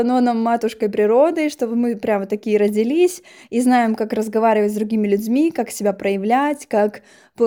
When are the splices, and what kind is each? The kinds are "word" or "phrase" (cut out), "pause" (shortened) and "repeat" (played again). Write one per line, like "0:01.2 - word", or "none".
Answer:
none